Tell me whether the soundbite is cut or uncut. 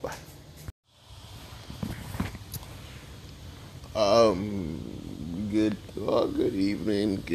cut